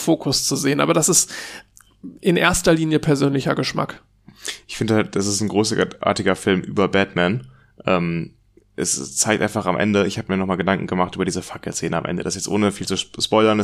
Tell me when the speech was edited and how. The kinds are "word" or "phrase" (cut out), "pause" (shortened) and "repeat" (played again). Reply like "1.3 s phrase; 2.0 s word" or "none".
none